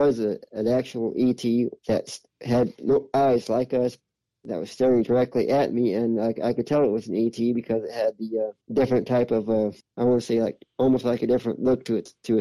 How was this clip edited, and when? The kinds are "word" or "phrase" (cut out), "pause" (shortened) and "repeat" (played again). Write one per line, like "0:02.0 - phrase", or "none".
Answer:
0:01.8 - pause
0:08.6 - pause
0:09.8 - pause